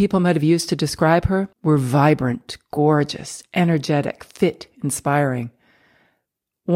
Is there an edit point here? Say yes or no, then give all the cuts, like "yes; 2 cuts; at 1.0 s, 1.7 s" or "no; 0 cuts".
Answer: yes; 1 cut; at 1.5 s